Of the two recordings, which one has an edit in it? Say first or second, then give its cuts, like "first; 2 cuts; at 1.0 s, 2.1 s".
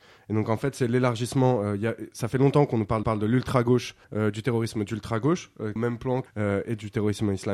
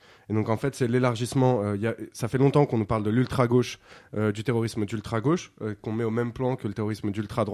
first; 4 cuts; at 3.0 s, 4.0 s, 5.8 s, 6.3 s